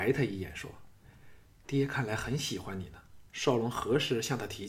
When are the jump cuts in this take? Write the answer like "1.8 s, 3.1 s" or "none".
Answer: 3.3 s